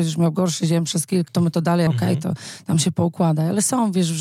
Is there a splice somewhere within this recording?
yes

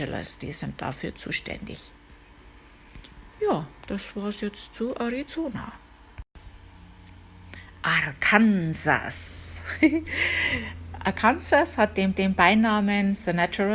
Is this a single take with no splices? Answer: no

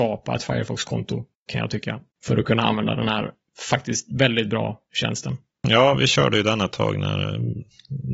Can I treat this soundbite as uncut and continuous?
yes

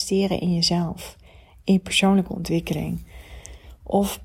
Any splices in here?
no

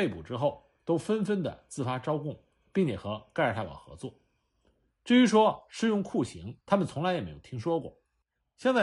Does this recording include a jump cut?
yes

